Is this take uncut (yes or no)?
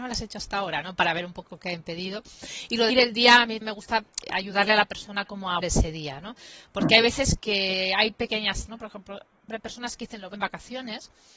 no